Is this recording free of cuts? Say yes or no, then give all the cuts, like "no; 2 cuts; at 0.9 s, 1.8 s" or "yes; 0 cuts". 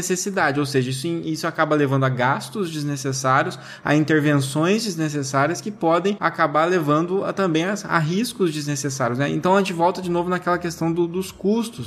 yes; 0 cuts